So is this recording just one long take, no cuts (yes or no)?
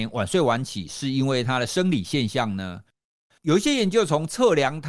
yes